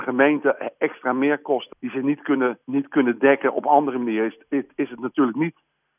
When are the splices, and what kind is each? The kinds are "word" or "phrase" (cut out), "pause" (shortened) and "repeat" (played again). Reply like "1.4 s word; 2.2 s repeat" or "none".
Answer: 1.7 s word; 2.6 s pause